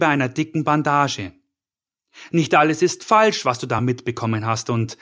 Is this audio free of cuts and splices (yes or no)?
yes